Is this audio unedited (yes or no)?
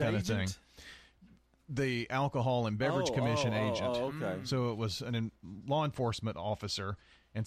yes